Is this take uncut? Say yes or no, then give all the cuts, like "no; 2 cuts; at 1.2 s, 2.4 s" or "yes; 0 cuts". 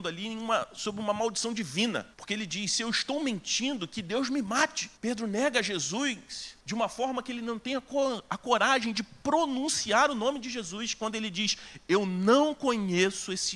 no; 3 cuts; at 2.1 s, 5.0 s, 6.6 s